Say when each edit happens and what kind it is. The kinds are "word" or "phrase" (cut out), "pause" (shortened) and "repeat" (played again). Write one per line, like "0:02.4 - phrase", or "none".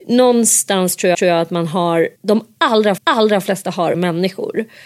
0:01.1 - repeat
0:02.2 - pause
0:03.0 - repeat
0:03.9 - phrase